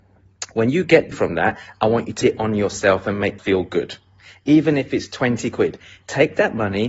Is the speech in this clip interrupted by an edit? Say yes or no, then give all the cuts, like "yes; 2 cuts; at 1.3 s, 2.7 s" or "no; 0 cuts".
yes; 3 cuts; at 1.1 s, 2.2 s, 3.4 s